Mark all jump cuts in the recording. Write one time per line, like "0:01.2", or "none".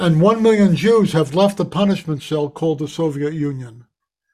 none